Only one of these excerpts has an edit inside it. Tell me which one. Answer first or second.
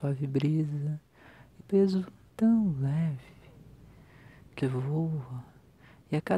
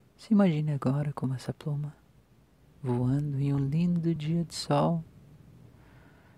first